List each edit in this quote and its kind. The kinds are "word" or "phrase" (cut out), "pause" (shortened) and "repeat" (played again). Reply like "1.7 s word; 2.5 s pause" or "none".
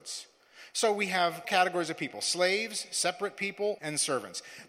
1.4 s word; 3.8 s word

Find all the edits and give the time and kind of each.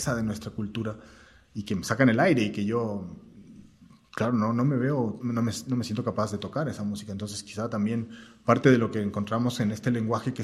5.2 s word

